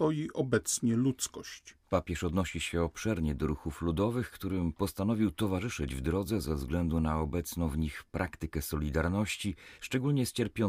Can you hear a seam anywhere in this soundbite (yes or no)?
yes